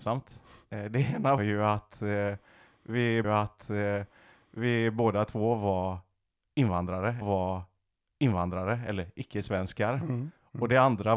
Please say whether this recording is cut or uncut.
cut